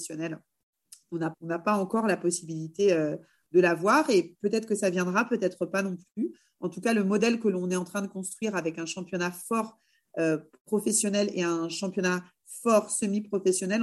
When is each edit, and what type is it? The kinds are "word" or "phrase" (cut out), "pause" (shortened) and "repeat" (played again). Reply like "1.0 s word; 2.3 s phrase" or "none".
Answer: 1.3 s word